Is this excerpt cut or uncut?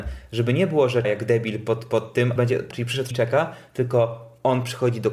cut